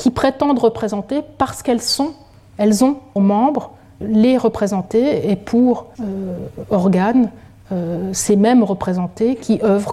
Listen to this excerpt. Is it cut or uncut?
cut